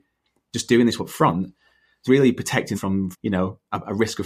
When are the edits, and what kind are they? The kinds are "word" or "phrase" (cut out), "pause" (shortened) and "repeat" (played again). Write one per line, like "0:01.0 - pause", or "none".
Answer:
0:01.0 - word
0:02.1 - word
0:02.7 - word
0:03.1 - word